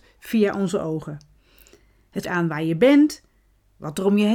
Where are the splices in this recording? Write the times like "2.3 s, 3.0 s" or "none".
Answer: 2.2 s